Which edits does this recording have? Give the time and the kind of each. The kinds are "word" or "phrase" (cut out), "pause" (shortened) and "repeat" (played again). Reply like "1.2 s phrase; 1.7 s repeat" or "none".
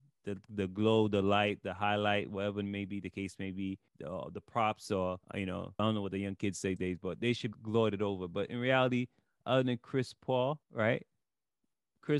3.9 s pause; 5.2 s pause; 5.8 s word; 6.8 s word; 7.5 s word; 10.6 s pause